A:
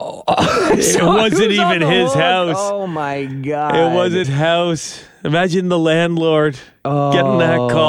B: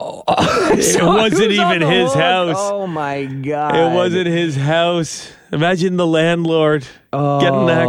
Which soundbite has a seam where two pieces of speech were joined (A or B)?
A